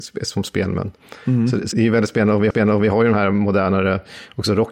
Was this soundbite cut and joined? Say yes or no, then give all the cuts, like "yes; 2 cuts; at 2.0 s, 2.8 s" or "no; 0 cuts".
yes; 2 cuts; at 1.7 s, 2.5 s